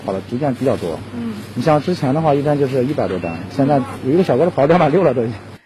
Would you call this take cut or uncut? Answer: uncut